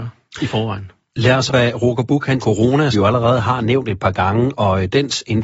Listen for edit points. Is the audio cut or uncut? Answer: cut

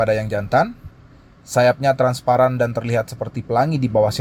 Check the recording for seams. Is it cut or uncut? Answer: uncut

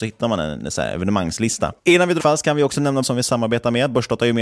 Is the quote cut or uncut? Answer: cut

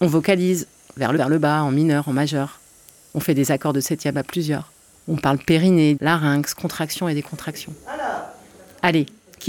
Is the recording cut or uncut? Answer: cut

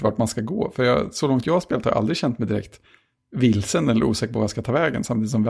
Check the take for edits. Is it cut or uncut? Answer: uncut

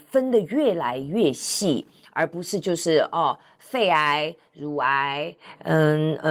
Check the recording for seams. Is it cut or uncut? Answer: uncut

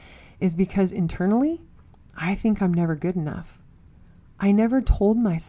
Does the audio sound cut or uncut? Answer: uncut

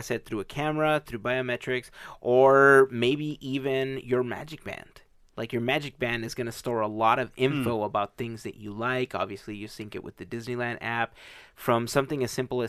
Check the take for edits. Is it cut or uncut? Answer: uncut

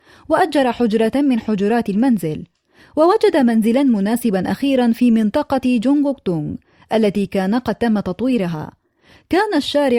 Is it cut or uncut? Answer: uncut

